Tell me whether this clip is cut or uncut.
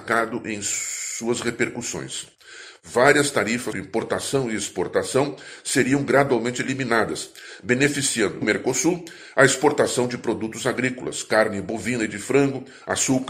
cut